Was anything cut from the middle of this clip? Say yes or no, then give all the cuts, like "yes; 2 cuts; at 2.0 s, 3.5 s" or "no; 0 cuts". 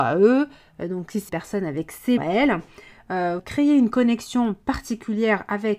yes; 3 cuts; at 1.3 s, 2.2 s, 3.4 s